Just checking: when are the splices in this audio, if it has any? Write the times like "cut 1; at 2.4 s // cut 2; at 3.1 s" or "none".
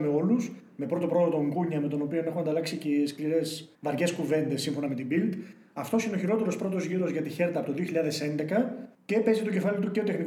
cut 1; at 3.7 s // cut 2; at 8.9 s